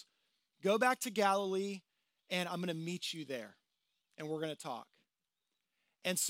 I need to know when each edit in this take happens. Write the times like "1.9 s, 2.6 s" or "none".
none